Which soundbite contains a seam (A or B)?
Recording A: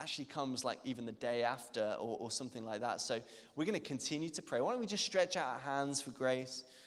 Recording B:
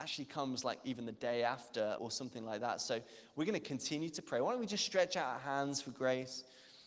B